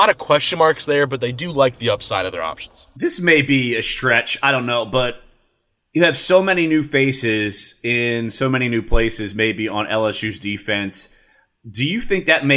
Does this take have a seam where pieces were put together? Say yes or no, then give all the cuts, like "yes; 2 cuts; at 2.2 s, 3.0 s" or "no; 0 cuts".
no; 0 cuts